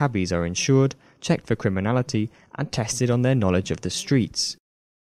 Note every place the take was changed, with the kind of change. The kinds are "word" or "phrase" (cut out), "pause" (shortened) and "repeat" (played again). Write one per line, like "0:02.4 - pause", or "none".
none